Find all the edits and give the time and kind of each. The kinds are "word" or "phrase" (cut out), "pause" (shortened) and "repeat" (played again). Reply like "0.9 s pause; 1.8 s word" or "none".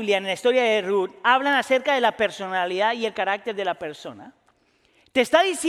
none

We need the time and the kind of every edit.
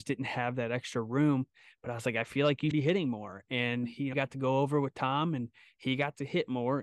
2.7 s word; 4.1 s word

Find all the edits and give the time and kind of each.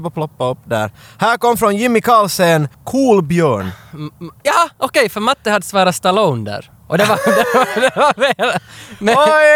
2.7 s pause

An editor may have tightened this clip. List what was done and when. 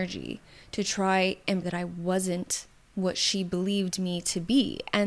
1.6 s phrase; 2.8 s pause

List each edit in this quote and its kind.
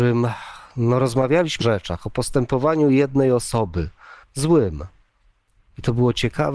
1.6 s phrase; 4.2 s pause

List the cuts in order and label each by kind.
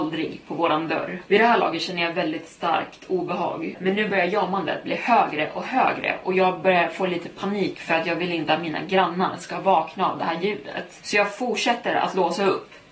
none

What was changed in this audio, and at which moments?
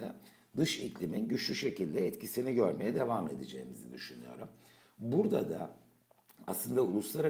none

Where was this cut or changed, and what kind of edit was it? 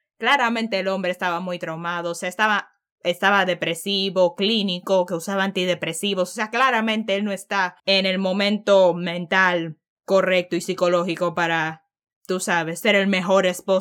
7.8 s pause

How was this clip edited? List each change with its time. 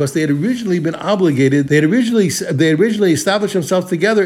1.6 s word

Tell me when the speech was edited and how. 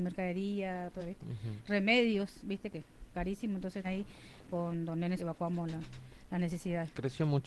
1.0 s word; 3.1 s word; 3.8 s word; 5.2 s word

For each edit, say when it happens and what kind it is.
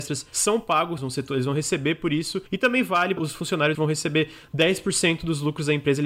1.0 s phrase; 2.5 s pause; 3.2 s phrase; 3.7 s phrase

